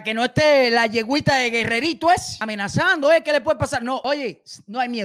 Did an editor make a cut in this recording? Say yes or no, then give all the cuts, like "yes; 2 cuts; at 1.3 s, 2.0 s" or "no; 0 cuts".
no; 0 cuts